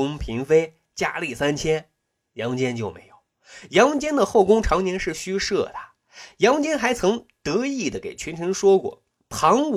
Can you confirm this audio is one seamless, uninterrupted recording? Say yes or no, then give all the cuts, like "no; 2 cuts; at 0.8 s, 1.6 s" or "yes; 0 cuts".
yes; 0 cuts